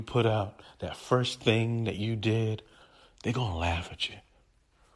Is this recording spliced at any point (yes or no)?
no